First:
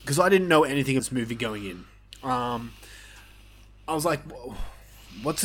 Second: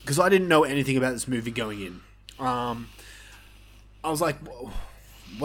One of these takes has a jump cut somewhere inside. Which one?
first; 1 cut; at 1.0 s

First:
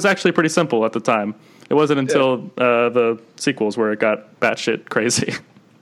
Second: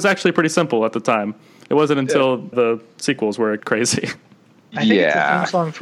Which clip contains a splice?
second; 2 cuts; at 2.5 s, 3.6 s

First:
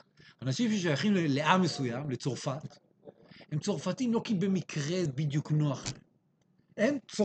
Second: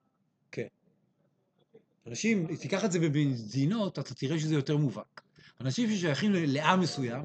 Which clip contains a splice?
first; 1 cut; at 5.1 s

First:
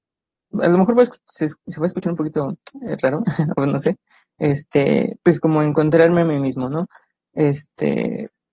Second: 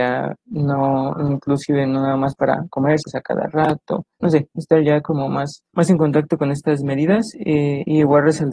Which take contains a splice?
second; 3 cuts; at 3.0 s, 4.1 s, 5.7 s

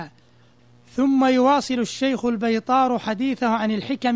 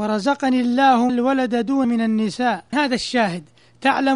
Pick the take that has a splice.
second; 3 cuts; at 1.1 s, 1.8 s, 2.7 s

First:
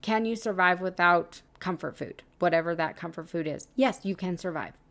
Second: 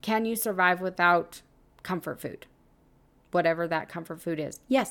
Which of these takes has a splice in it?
first; 2 cuts; at 1.5 s, 2.3 s

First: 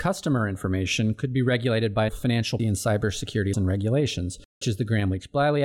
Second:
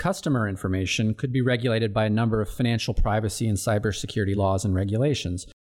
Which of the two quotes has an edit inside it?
first; 4 cuts; at 2.1 s, 2.6 s, 3.5 s, 4.6 s

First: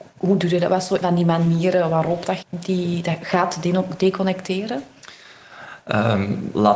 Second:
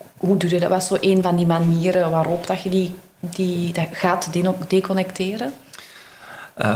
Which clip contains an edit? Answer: first; 2 cuts; at 1.0 s, 2.4 s

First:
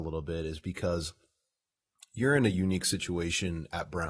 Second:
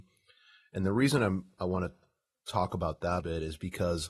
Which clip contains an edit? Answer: second; 1 cut; at 3.2 s

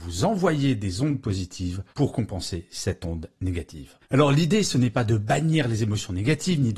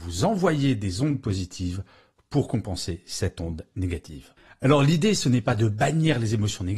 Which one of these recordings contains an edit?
first; 2 cuts; at 1.9 s, 4.0 s

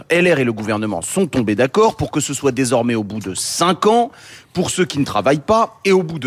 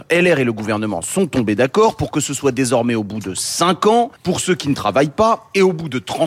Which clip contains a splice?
second; 1 cut; at 4.2 s

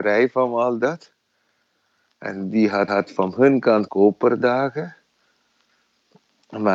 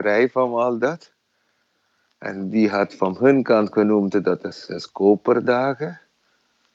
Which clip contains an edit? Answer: first; 2 cuts; at 2.9 s, 3.9 s

